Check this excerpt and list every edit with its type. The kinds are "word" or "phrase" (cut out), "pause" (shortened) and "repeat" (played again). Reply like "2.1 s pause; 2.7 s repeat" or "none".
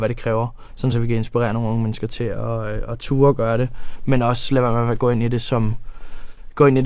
none